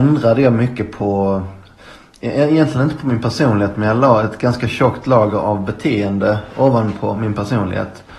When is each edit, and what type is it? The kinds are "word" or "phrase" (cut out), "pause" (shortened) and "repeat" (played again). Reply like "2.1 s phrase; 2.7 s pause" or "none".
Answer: none